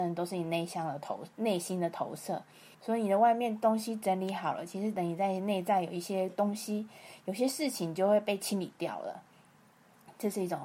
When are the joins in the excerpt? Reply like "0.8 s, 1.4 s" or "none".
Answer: 2.7 s